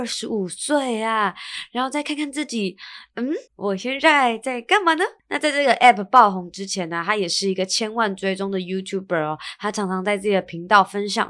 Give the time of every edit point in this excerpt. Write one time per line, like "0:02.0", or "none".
0:03.5
0:05.2